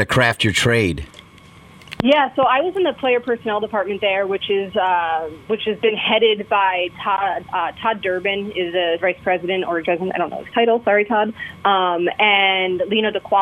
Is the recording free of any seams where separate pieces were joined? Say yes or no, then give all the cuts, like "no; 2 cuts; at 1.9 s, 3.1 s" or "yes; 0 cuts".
no; 3 cuts; at 5.4 s, 9.0 s, 9.8 s